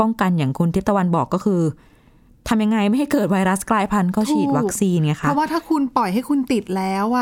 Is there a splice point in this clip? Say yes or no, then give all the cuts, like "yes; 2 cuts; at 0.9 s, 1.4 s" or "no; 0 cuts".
no; 0 cuts